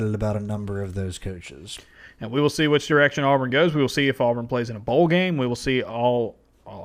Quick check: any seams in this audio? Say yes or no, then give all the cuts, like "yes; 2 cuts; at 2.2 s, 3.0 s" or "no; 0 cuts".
no; 0 cuts